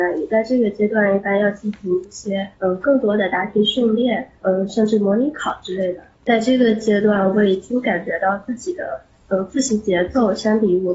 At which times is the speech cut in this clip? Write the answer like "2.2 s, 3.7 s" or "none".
2.5 s, 6.1 s